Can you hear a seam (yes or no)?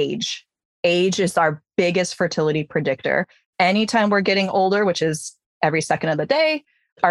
no